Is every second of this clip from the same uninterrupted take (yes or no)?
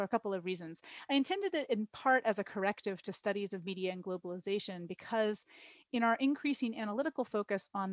yes